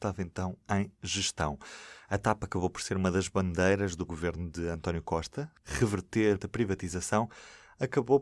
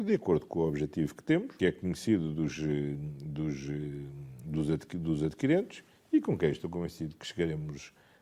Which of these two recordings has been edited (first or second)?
first